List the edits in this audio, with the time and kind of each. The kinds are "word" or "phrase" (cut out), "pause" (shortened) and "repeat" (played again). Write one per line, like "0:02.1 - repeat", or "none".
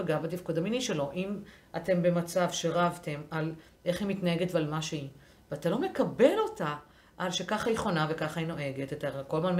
none